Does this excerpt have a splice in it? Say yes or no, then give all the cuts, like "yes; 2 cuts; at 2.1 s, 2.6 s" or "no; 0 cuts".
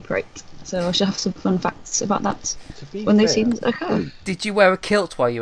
no; 0 cuts